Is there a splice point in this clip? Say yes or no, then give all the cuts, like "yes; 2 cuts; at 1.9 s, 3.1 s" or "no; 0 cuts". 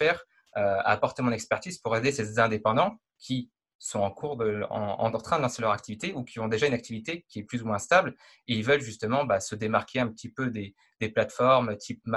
no; 0 cuts